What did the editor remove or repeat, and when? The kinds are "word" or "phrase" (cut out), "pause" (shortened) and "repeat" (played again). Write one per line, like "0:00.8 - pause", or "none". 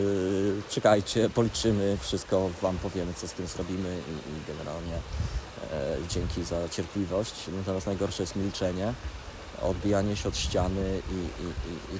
none